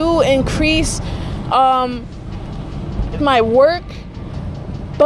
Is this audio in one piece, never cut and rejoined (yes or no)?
no